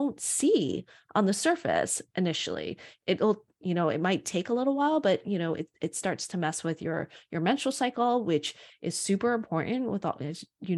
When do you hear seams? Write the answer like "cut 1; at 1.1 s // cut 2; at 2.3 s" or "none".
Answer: none